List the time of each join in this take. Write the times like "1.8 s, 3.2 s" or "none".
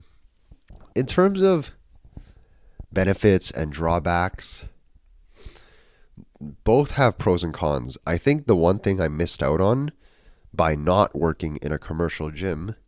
0.9 s

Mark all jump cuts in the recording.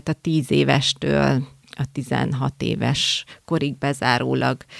none

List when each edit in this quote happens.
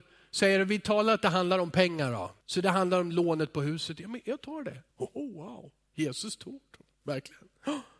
2.4 s, 4.9 s

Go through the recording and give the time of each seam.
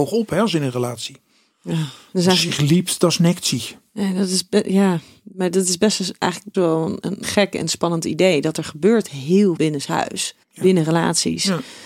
6.5 s, 7.2 s, 9.6 s, 10.4 s

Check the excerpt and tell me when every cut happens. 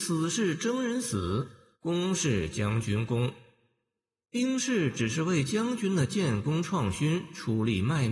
none

